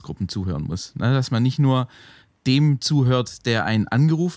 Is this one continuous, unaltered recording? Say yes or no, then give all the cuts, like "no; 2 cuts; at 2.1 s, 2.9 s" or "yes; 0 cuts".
yes; 0 cuts